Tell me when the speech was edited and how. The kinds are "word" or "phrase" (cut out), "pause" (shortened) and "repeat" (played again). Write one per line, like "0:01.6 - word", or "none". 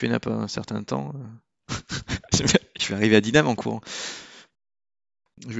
none